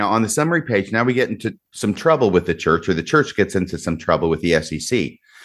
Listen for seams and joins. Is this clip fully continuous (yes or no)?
no